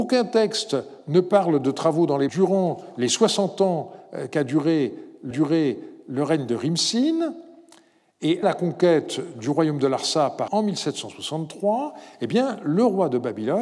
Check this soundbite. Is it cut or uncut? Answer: cut